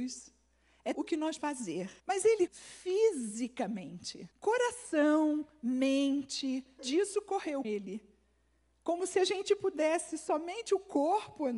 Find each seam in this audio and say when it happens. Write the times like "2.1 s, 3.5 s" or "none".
0.9 s, 1.4 s, 2.0 s, 2.5 s, 4.3 s, 6.8 s, 7.6 s